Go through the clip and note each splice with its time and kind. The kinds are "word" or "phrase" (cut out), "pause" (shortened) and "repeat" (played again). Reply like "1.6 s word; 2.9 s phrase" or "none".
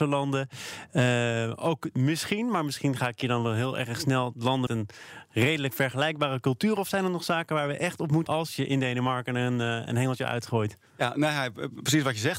4.7 s word; 8.3 s word; 10.9 s pause